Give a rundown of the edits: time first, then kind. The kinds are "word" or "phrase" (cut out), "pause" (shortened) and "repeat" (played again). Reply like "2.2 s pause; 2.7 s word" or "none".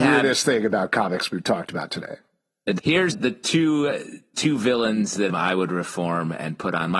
2.8 s word; 3.1 s word; 5.3 s word